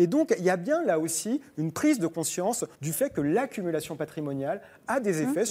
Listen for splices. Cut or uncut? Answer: cut